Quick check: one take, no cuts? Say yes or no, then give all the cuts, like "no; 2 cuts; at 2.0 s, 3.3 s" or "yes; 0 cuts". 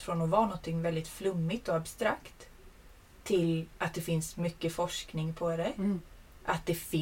yes; 0 cuts